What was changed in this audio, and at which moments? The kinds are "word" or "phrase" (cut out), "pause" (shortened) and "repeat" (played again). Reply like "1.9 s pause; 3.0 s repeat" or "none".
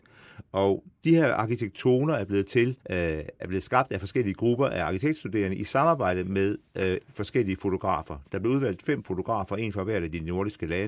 2.8 s pause; 3.4 s word; 6.7 s pause